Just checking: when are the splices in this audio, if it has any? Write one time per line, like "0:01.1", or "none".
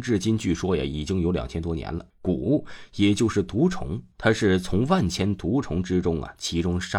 0:02.1
0:04.1